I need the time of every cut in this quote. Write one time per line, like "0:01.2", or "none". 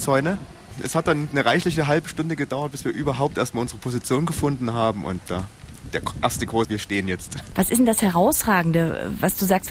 0:05.2
0:06.6